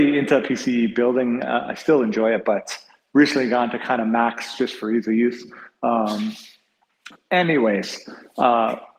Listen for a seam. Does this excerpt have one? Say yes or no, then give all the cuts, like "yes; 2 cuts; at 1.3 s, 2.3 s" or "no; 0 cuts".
no; 0 cuts